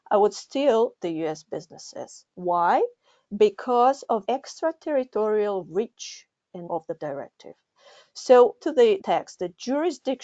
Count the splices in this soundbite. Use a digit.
6